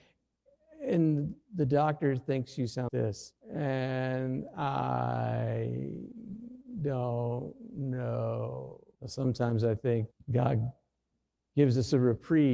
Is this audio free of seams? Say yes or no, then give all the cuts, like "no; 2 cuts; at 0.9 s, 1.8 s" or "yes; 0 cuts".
no; 5 cuts; at 1.4 s, 2.9 s, 3.4 s, 8.9 s, 10.1 s